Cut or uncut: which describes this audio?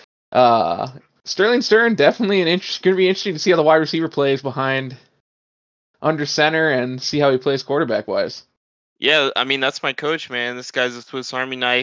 uncut